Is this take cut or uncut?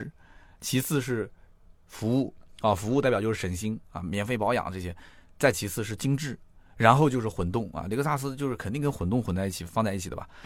uncut